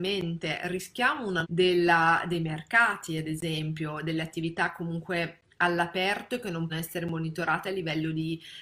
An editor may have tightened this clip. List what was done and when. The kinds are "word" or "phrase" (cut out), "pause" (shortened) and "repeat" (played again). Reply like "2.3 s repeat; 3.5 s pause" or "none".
1.4 s phrase; 6.7 s word